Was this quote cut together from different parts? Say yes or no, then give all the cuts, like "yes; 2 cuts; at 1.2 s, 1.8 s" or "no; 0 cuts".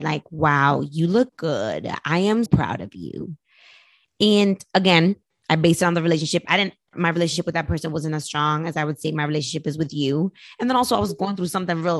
yes; 3 cuts; at 1.3 s, 2.5 s, 6.9 s